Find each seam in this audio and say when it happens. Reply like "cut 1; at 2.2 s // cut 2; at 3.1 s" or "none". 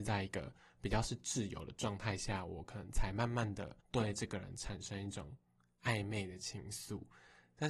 cut 1; at 3.8 s

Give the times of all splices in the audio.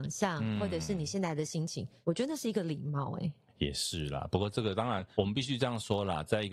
none

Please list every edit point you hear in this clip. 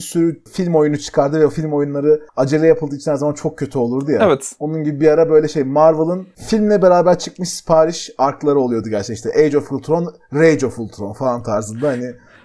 cut 1; at 2.3 s

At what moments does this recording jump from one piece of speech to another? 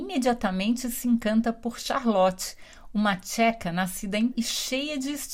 cut 1; at 4.3 s

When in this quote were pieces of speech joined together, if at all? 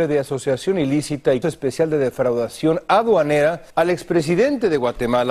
cut 1; at 1.4 s // cut 2; at 3.7 s

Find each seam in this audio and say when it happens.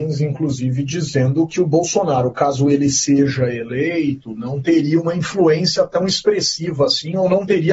none

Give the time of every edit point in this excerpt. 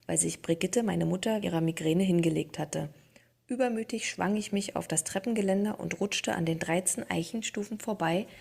cut 1; at 1.4 s

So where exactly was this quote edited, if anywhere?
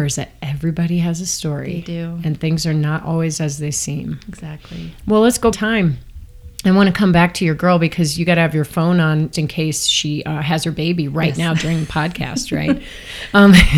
cut 1; at 5.5 s // cut 2; at 9.3 s

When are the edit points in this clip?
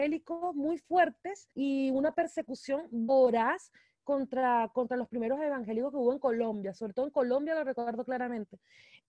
cut 1; at 1.5 s

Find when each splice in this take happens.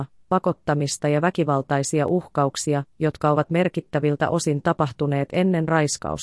none

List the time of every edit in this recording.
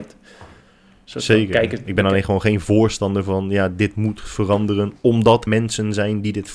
cut 1; at 5.5 s

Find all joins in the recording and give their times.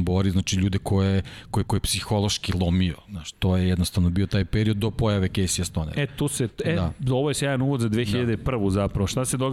cut 1; at 1.6 s // cut 2; at 3.3 s

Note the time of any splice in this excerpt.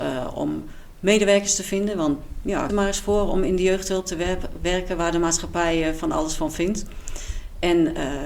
cut 1; at 2.7 s

